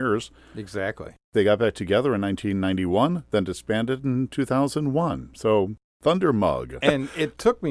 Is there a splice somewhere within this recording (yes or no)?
no